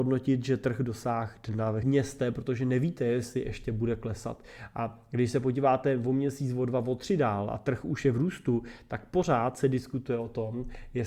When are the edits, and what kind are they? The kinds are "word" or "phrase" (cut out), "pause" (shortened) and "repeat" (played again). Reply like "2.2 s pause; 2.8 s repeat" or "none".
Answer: 1.8 s phrase